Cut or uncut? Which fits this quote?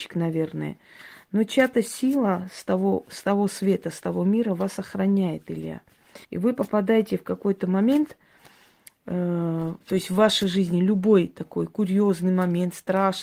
cut